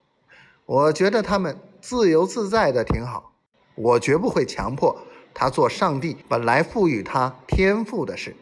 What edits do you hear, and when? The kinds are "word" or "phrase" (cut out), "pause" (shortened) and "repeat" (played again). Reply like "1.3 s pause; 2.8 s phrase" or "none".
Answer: 3.5 s pause; 6.2 s pause